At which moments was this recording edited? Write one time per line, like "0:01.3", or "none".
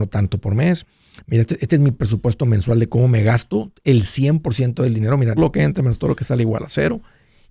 0:05.4